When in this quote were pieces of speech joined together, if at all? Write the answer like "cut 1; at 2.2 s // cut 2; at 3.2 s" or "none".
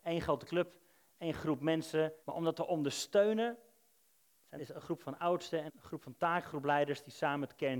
cut 1; at 2.2 s // cut 2; at 4.6 s // cut 3; at 5.7 s